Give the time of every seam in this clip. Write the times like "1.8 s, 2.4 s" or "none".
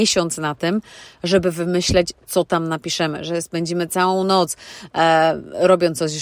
none

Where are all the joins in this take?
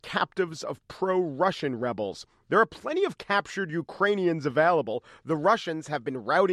none

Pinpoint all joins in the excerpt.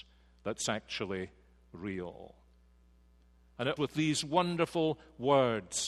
3.8 s

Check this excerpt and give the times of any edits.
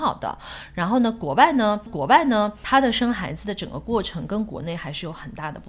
1.9 s

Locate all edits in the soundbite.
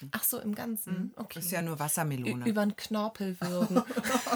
none

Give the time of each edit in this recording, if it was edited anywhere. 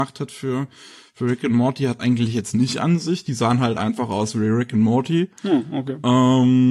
2.0 s, 5.4 s

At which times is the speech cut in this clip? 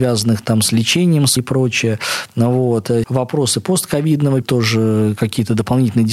1.4 s, 3.0 s, 4.4 s

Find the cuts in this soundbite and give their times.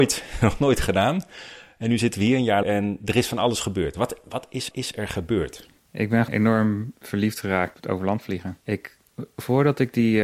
2.6 s, 4.7 s, 5.8 s, 6.3 s, 7.7 s, 8.6 s

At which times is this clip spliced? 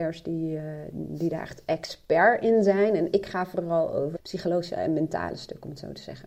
0.9 s, 4.1 s

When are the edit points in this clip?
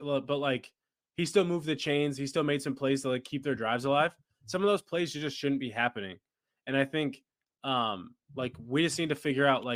none

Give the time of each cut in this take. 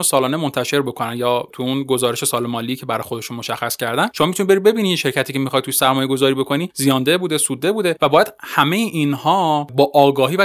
none

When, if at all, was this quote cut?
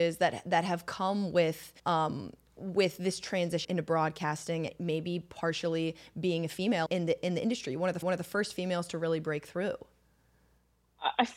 1.8 s, 3.6 s, 4.7 s, 6.9 s, 8.0 s

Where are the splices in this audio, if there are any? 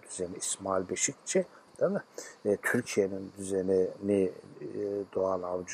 none

